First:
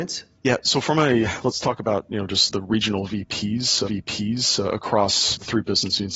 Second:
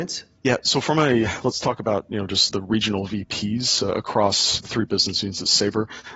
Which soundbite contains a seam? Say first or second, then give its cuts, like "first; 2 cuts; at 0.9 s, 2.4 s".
first; 1 cut; at 3.9 s